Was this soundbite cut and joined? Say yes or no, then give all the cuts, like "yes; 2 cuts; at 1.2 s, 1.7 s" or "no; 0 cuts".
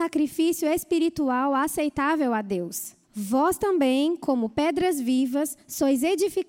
yes; 1 cut; at 3.0 s